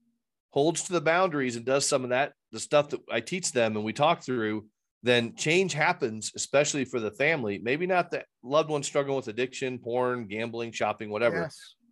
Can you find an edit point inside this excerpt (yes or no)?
no